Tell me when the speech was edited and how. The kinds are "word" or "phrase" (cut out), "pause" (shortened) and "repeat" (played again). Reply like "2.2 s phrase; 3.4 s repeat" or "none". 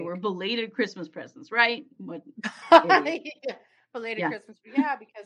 none